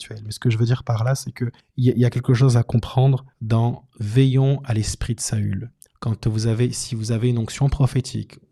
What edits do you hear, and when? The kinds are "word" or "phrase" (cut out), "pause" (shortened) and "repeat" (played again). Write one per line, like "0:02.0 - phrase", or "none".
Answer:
0:01.6 - pause
0:03.3 - pause
0:05.9 - pause